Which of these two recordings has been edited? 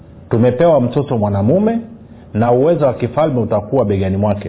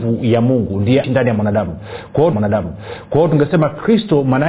second; 2 cuts; at 1.0 s, 2.3 s

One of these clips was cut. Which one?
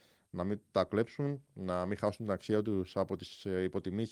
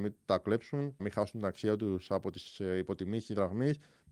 second; 1 cut; at 1.0 s

